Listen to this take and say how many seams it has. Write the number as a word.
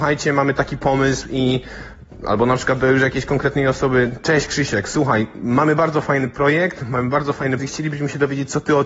one